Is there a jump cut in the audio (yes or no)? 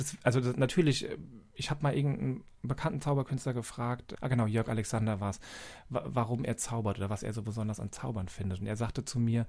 yes